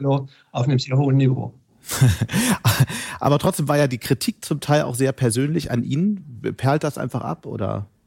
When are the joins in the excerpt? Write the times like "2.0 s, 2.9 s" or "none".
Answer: none